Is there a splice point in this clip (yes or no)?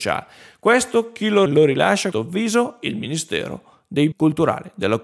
yes